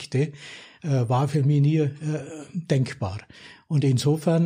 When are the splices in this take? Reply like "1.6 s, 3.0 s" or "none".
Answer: none

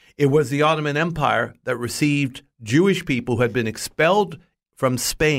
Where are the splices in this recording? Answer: none

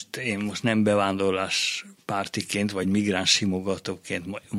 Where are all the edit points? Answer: none

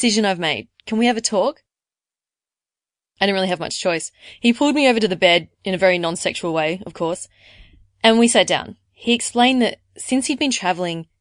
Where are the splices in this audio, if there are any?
8.9 s

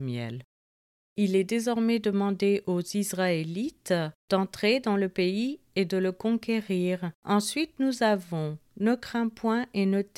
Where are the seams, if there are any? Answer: 4.2 s, 7.1 s

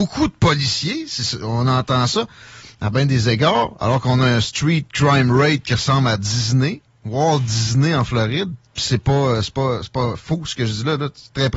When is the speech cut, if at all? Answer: none

